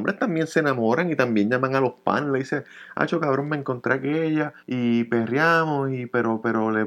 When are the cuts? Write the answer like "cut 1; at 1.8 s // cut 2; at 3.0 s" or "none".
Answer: cut 1; at 4.6 s

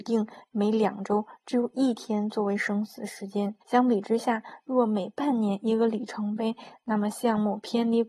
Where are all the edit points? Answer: cut 1; at 3.6 s

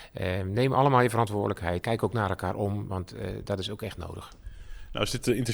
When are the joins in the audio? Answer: cut 1; at 1.8 s

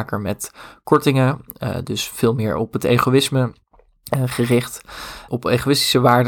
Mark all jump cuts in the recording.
cut 1; at 5.3 s

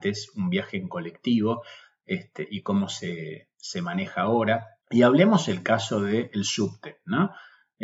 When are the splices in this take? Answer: none

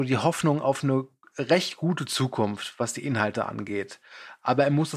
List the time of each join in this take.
none

